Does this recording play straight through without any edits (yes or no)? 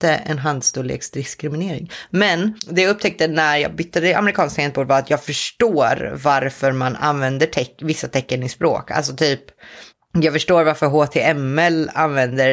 no